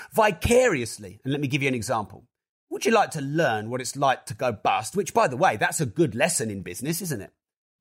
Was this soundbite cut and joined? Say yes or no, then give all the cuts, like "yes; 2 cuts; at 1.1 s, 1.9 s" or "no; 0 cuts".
no; 0 cuts